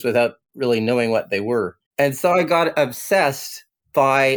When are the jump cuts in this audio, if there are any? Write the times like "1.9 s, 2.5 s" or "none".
1.9 s